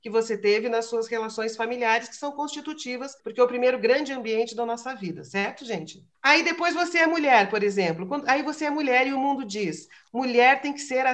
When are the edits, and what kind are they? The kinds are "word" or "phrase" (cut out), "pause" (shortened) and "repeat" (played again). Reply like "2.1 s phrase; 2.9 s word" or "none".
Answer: 3.2 s pause; 6.1 s pause